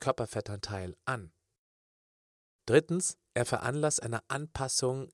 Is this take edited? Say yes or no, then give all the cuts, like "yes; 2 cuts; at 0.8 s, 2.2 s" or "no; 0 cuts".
no; 0 cuts